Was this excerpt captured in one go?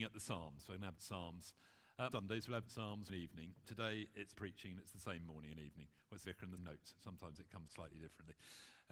no; 9 cuts; at 1.0 s, 2.1 s, 2.7 s, 3.1 s, 3.6 s, 4.3 s, 6.2 s, 6.6 s, 7.7 s

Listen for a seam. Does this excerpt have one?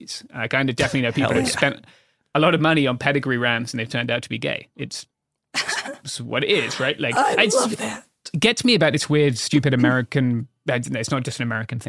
no; 0 cuts

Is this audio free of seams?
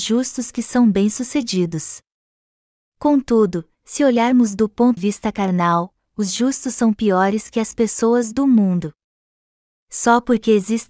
no; 1 cut; at 5.0 s

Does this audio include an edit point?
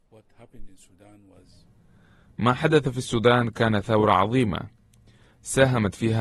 no; 0 cuts

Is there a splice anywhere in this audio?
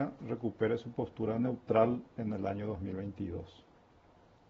no; 0 cuts

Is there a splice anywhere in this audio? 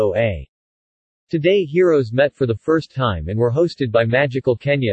no; 0 cuts

